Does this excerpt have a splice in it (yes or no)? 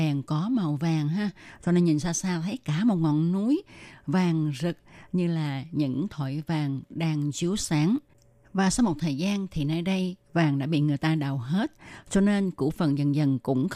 no